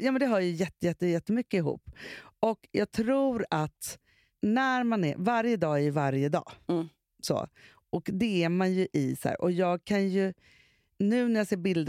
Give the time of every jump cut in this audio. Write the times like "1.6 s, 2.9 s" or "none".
none

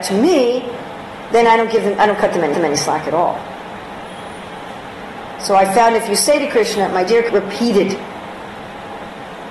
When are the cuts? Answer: 2.5 s, 7.3 s

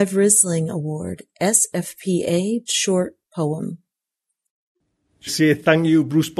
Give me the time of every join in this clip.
2.7 s, 5.3 s

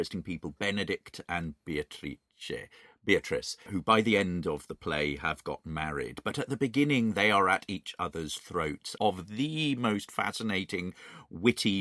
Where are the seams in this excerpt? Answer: 3.7 s, 9.0 s

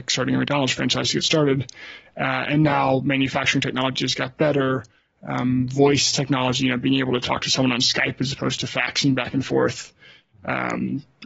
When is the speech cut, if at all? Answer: none

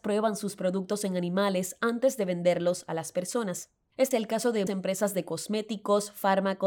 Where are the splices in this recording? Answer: 4.1 s, 4.7 s

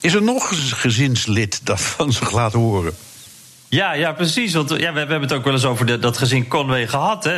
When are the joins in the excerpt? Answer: none

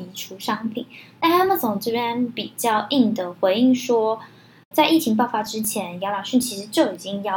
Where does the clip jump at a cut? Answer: 4.7 s

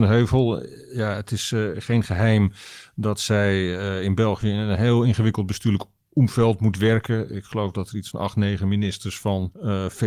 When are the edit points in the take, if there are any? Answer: none

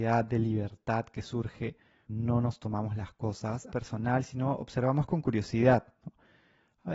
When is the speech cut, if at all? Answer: 2.1 s, 3.7 s

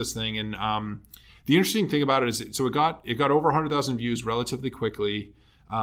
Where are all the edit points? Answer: none

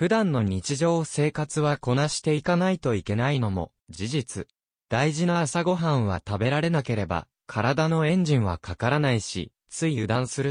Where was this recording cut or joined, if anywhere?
none

